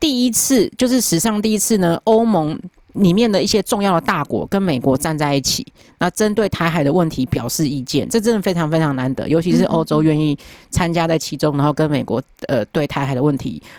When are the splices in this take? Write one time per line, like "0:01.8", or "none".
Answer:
none